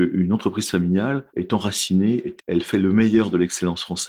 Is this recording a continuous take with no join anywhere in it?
no; 2 cuts; at 1.3 s, 2.4 s

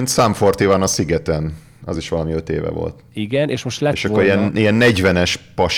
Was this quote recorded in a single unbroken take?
yes; 0 cuts

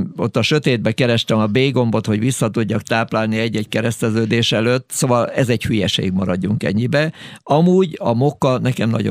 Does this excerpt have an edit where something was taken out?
no; 0 cuts

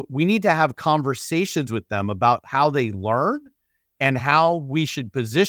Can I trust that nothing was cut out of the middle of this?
yes; 0 cuts

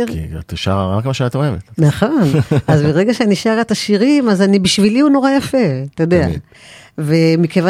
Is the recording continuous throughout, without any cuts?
yes; 0 cuts

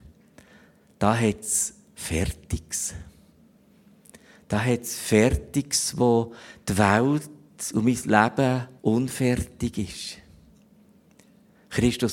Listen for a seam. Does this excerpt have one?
yes; 1 cut; at 8.8 s

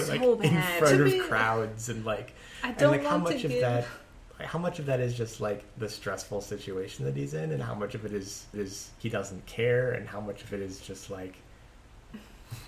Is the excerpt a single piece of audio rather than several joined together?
no; 1 cut; at 8.5 s

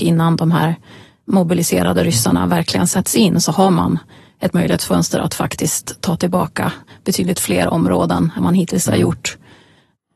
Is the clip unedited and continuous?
no; 1 cut; at 8.4 s

